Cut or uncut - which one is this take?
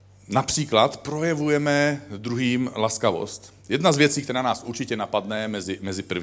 uncut